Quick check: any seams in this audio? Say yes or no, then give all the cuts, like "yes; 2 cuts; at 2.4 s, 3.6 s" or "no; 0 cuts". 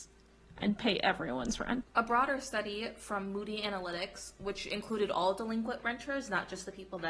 yes; 1 cut; at 1.9 s